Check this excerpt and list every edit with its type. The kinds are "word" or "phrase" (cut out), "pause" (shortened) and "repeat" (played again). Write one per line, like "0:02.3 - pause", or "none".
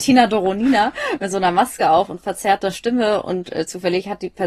none